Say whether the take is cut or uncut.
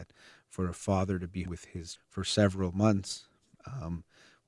cut